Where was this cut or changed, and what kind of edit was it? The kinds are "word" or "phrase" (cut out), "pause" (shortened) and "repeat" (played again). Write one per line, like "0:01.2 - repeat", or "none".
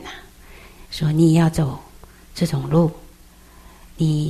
none